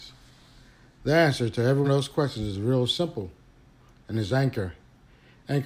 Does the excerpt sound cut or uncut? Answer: cut